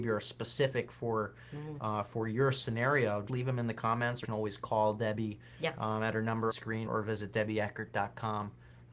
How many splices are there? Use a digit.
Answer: 4